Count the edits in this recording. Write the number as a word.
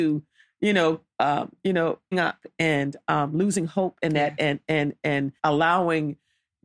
two